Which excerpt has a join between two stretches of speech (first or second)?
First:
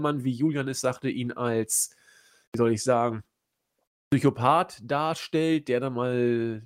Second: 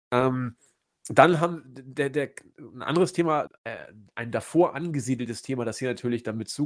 second